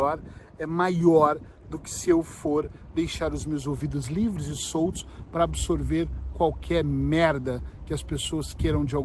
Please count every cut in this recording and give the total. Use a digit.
0